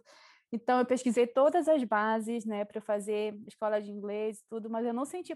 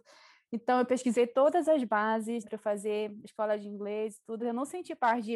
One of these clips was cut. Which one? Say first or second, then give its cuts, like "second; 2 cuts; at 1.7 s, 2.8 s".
second; 2 cuts; at 2.4 s, 4.4 s